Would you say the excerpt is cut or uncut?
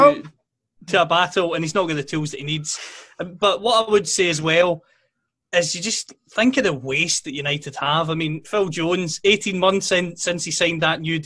uncut